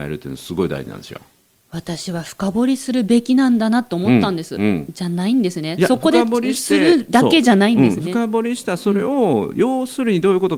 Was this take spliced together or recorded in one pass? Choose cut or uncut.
uncut